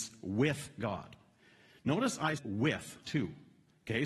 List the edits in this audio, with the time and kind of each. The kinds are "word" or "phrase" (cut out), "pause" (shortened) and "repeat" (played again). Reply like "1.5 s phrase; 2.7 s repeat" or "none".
2.4 s word; 3.0 s word